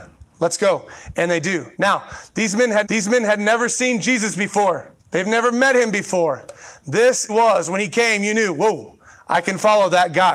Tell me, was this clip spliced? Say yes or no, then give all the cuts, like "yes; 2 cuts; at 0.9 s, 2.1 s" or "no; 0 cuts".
yes; 5 cuts; at 1.7 s, 2.8 s, 5.0 s, 7.3 s, 9.1 s